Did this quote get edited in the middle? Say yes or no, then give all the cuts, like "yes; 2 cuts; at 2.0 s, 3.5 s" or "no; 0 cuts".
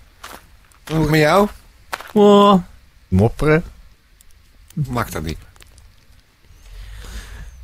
yes; 2 cuts; at 1.1 s, 3.1 s